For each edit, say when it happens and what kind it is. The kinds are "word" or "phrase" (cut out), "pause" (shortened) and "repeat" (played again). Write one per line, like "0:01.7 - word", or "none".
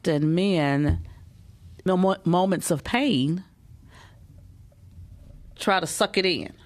0:01.9 - word